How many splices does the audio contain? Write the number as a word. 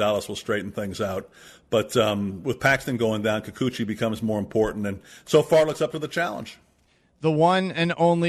zero